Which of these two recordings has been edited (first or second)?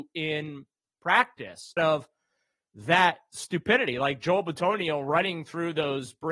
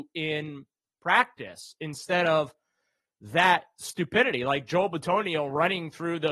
first